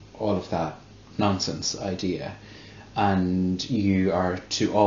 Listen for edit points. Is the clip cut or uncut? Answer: uncut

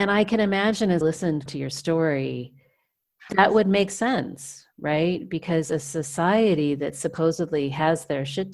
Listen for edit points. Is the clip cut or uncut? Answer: cut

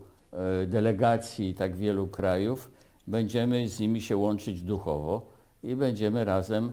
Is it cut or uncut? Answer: uncut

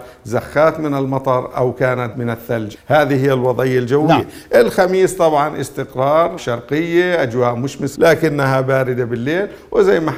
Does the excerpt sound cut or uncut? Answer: cut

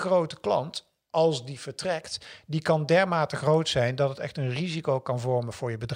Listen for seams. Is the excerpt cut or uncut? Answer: uncut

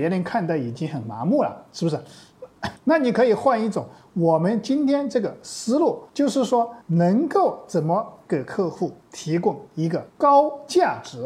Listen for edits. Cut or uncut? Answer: cut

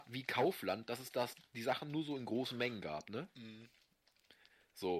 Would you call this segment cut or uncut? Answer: uncut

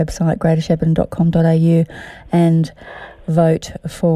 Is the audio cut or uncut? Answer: uncut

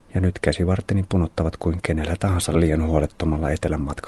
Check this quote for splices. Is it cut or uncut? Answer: uncut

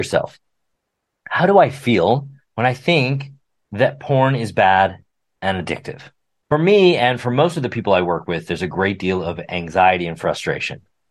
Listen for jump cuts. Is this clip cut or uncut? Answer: uncut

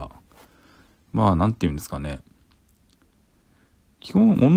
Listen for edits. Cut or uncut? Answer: uncut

